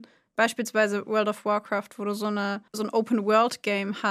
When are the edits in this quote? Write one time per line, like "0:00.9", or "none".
0:02.7

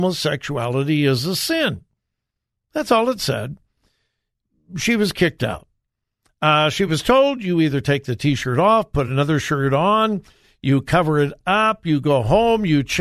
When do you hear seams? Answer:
none

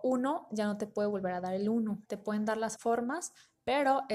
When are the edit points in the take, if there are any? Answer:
0:02.0
0:02.8

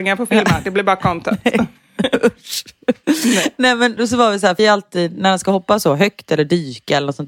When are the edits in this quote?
0:04.0
0:04.6

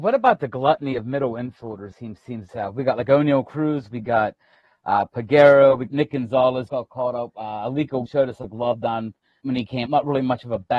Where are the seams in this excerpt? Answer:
0:01.9
0:02.5
0:05.9
0:06.7
0:08.1
0:09.4
0:09.9

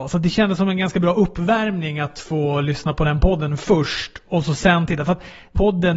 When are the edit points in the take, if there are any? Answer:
none

